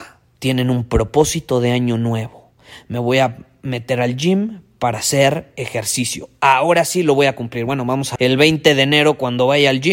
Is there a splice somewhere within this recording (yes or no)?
yes